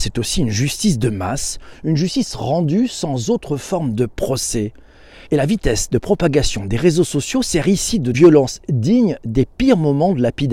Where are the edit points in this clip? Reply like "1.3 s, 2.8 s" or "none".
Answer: 5.3 s, 8.1 s